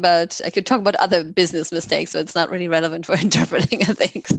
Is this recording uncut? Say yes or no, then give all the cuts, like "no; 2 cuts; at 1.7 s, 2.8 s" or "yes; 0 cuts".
yes; 0 cuts